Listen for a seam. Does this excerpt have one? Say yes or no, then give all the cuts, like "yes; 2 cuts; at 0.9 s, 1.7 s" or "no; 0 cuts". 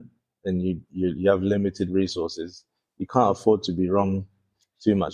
no; 0 cuts